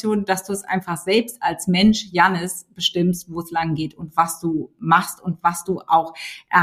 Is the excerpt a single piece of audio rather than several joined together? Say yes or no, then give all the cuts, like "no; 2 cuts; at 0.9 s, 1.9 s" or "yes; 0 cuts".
yes; 0 cuts